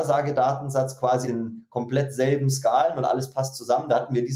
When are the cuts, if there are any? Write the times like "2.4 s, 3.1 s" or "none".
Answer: 1.2 s